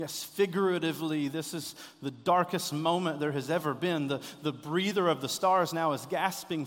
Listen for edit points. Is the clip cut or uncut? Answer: uncut